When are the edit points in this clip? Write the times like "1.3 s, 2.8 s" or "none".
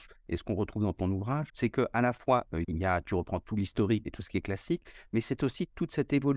1.5 s, 2.6 s, 4.0 s